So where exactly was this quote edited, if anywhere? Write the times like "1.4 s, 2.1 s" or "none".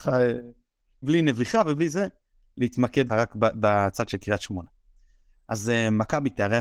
1.0 s, 3.1 s